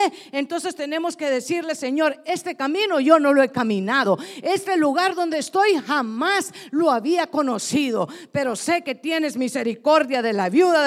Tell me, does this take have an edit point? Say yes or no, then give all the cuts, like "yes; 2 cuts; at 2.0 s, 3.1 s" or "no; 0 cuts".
no; 0 cuts